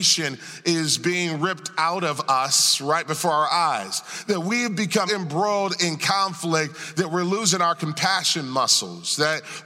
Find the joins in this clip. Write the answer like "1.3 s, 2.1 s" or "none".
5.1 s